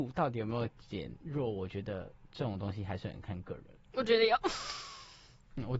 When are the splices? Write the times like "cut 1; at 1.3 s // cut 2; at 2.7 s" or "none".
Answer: cut 1; at 3.8 s